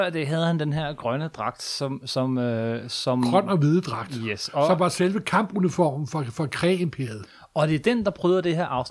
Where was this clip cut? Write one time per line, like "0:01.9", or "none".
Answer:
none